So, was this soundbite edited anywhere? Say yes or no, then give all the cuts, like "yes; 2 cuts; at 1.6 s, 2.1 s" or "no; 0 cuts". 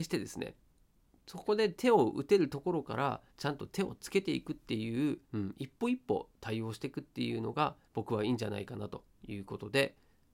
yes; 3 cuts; at 3.3 s, 5.2 s, 7.8 s